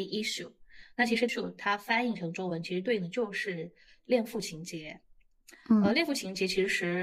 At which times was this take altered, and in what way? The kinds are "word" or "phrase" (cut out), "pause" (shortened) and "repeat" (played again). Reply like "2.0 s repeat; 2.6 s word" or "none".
1.3 s word